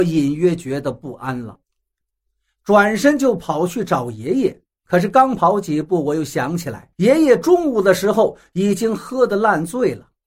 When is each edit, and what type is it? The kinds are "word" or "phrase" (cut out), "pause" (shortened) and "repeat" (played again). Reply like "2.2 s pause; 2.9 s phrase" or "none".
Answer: 6.9 s pause